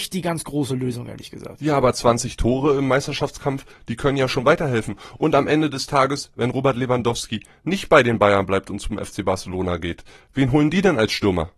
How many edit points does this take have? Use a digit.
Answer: 0